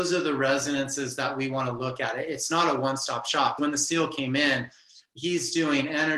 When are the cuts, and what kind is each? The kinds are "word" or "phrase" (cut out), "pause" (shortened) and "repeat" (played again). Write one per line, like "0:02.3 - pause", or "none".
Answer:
0:03.6 - word